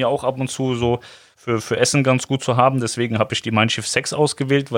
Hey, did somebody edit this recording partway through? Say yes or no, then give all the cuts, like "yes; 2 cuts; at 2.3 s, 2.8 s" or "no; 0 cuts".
no; 0 cuts